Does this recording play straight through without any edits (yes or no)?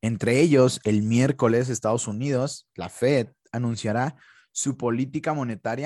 yes